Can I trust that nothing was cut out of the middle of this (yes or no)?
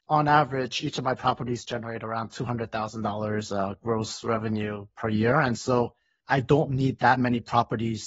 yes